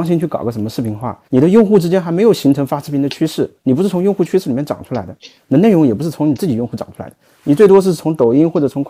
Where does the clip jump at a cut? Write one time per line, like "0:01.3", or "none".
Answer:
0:01.3
0:03.6